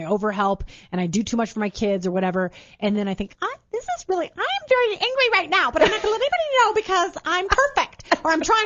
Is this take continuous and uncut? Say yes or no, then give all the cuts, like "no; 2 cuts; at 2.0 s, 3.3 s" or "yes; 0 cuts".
yes; 0 cuts